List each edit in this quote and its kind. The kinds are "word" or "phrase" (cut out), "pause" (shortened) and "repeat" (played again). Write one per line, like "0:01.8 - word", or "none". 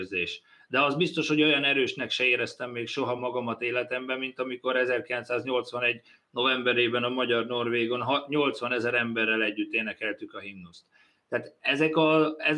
none

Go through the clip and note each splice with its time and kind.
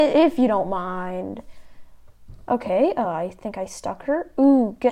none

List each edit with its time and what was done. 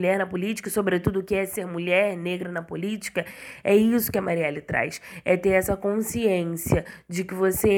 none

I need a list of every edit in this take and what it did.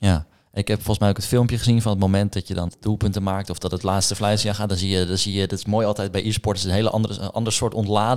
0:02.7 - word

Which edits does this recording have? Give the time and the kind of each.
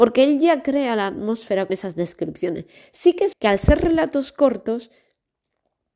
0:01.7 - word
0:03.3 - word

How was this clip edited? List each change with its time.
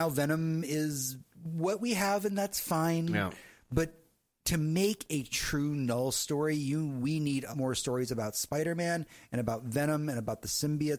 0:07.5 - word

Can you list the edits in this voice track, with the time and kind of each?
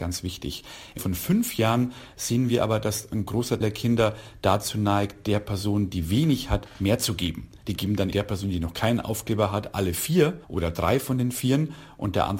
0:01.0 - word
0:03.6 - word
0:08.1 - word
0:10.4 - pause

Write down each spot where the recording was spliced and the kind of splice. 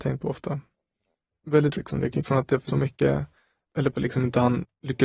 0:01.7 - word
0:02.2 - word
0:02.7 - word
0:03.9 - word

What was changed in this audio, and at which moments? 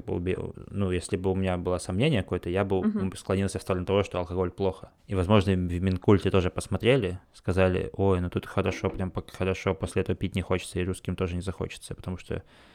0:05.0 - pause
0:07.2 - pause

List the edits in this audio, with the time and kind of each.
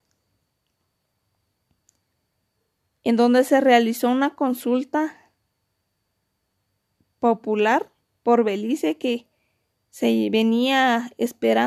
none

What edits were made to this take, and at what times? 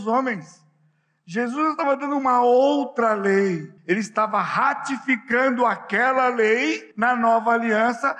0:03.8 - pause
0:06.9 - pause

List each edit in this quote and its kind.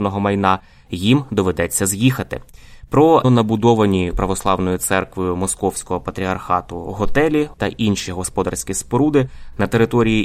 0:03.2 - word
0:04.1 - word
0:07.5 - word

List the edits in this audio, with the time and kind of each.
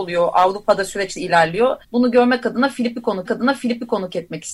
0:01.2 - word
0:01.8 - pause
0:03.3 - repeat

